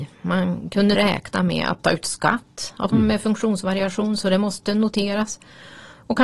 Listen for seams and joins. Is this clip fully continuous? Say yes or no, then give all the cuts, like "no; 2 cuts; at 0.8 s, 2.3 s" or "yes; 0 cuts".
no; 2 cuts; at 0.9 s, 2.9 s